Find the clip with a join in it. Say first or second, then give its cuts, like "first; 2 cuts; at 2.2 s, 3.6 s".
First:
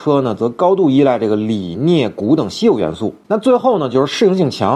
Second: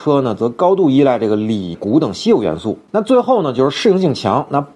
second; 1 cut; at 1.7 s